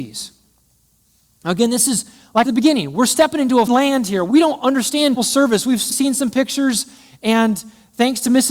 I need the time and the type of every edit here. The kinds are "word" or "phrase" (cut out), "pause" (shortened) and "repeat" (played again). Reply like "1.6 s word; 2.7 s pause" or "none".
2.5 s phrase; 3.7 s word; 4.3 s phrase; 5.2 s word; 5.9 s word